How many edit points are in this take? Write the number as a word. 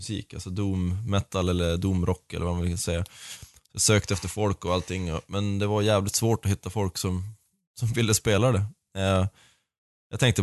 zero